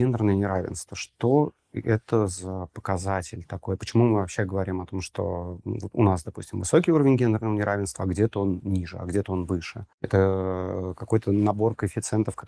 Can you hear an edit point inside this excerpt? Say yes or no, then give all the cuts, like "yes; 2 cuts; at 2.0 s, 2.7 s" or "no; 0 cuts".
yes; 1 cut; at 9.9 s